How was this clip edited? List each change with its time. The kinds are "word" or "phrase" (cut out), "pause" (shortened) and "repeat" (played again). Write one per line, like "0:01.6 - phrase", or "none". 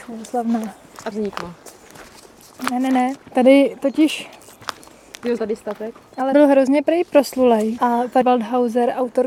0:01.1 - phrase
0:05.4 - word
0:06.3 - word
0:08.2 - word